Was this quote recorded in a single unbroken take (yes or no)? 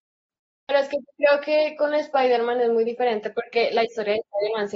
yes